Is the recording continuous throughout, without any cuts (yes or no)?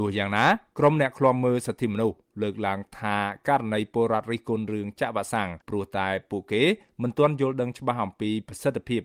no